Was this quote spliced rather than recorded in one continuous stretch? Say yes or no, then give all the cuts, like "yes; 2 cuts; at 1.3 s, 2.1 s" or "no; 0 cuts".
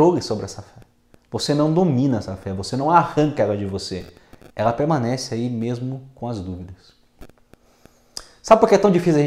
no; 0 cuts